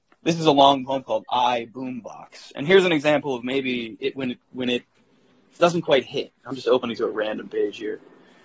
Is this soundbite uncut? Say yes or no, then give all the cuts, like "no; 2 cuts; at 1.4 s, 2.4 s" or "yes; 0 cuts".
yes; 0 cuts